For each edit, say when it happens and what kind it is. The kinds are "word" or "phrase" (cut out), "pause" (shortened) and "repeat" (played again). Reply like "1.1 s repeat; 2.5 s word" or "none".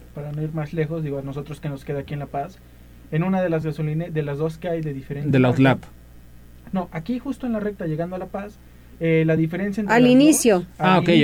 none